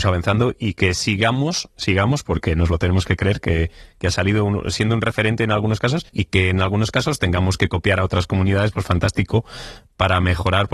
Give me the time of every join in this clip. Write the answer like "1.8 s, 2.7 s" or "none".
6.1 s